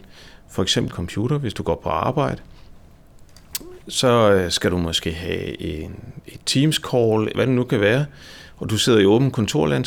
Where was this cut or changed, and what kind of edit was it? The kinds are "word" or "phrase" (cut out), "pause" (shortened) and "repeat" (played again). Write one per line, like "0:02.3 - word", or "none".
0:00.9 - word
0:07.3 - word